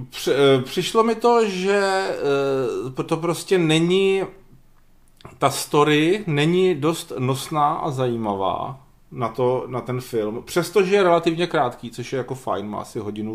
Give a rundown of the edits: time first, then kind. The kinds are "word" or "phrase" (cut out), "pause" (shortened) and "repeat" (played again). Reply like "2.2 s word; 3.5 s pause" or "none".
none